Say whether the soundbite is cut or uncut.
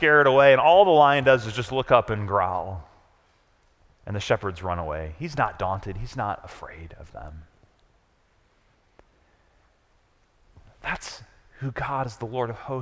uncut